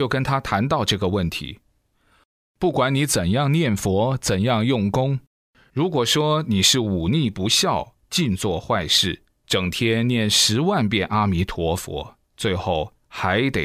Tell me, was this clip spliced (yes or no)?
no